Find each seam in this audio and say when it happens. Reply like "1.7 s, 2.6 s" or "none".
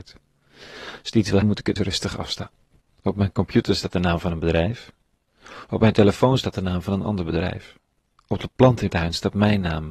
1.4 s, 1.8 s, 8.9 s